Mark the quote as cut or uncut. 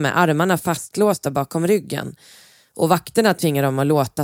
uncut